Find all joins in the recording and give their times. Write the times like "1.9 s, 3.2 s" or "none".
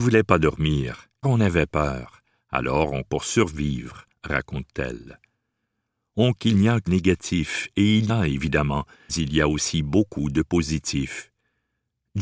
1.2 s, 3.0 s, 6.4 s, 6.9 s, 8.1 s, 9.1 s